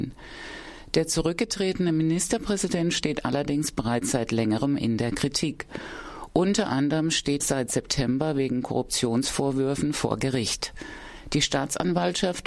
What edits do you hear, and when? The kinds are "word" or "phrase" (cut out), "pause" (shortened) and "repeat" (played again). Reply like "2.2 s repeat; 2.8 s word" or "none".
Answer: 7.4 s word